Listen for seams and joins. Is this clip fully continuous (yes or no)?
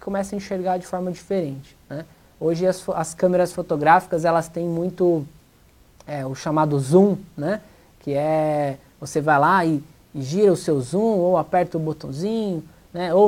yes